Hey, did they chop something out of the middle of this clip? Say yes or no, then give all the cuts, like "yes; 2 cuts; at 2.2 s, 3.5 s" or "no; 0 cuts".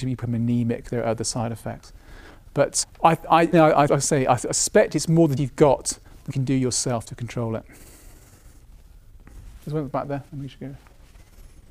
yes; 7 cuts; at 2.8 s, 3.5 s, 3.9 s, 5.4 s, 6.3 s, 9.6 s, 10.3 s